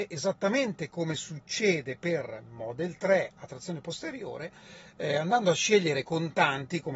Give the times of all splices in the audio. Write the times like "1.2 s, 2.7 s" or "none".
none